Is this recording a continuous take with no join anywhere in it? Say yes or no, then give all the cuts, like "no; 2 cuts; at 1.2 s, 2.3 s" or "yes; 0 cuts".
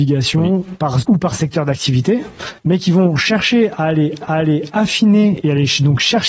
no; 3 cuts; at 1.0 s, 2.6 s, 4.2 s